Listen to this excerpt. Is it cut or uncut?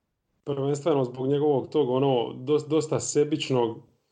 uncut